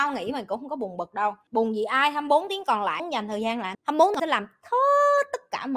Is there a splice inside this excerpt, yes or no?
yes